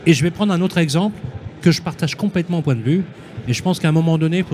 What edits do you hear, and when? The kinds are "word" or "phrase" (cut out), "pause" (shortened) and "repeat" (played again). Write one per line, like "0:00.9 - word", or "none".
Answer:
0:01.6 - word
0:02.6 - word